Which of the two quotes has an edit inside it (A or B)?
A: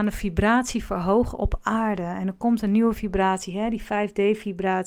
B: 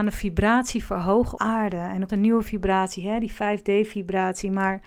B